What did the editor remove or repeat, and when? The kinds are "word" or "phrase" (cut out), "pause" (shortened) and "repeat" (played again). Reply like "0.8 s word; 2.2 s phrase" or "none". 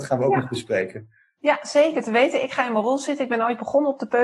none

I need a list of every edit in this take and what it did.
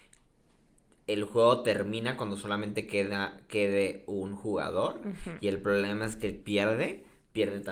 6.4 s word

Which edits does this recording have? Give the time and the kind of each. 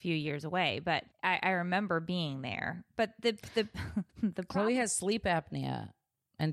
1.1 s pause; 4.1 s pause

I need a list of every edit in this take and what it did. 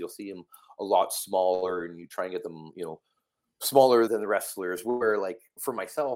4.1 s word

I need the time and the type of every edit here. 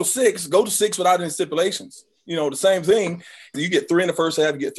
3.5 s phrase

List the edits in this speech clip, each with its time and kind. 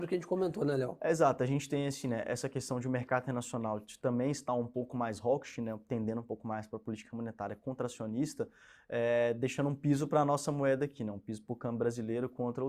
none

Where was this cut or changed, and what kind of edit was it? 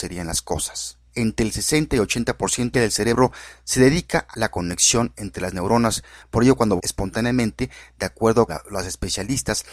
1.1 s pause; 2.7 s phrase; 4.3 s word; 6.8 s word; 8.5 s word

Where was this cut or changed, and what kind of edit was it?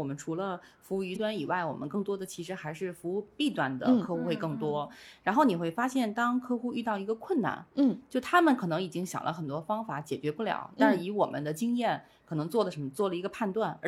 1.1 s word

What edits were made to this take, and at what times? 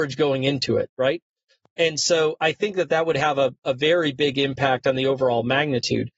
none

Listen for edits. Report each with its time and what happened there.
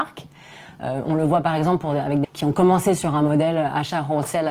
2.2 s word

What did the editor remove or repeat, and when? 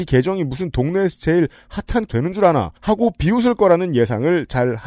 2.1 s word; 2.8 s pause

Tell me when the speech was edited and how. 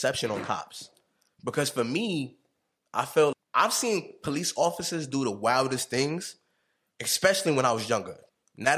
3.3 s word

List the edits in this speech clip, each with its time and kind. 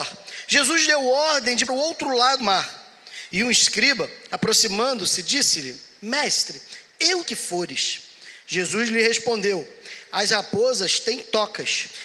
1.7 s phrase; 2.4 s word; 7.3 s phrase

